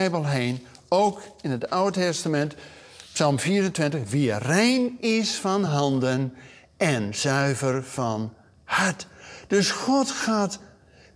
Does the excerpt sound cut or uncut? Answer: uncut